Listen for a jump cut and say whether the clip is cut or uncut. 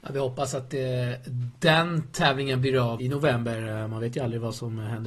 cut